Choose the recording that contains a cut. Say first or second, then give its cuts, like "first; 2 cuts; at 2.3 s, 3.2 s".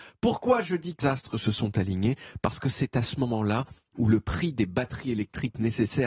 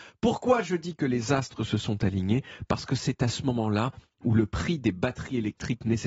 first; 1 cut; at 1.0 s